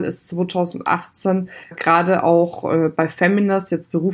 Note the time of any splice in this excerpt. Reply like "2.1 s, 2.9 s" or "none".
1.7 s

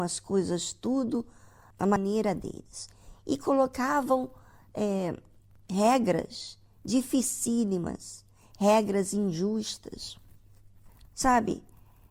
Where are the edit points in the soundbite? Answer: none

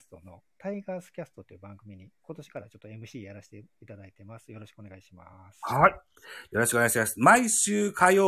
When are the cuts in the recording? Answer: none

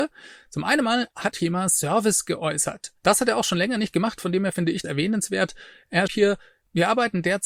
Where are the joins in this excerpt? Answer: 1.3 s, 4.8 s, 6.1 s

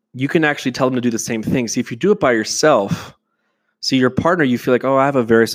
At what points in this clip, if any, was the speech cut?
none

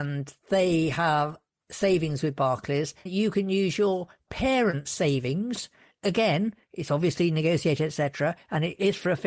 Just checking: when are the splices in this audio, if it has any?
3.1 s

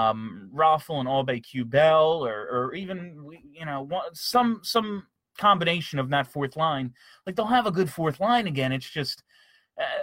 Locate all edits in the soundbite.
none

